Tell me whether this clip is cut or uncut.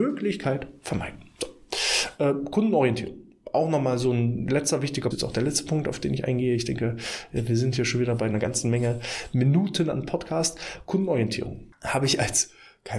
cut